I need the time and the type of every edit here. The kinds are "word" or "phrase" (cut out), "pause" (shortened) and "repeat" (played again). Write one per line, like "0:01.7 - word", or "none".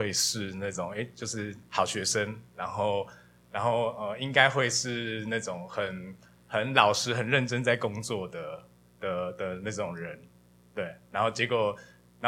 none